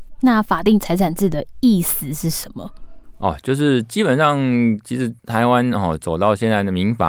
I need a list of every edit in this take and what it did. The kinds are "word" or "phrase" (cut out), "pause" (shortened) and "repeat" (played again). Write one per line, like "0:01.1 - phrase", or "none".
0:05.2 - pause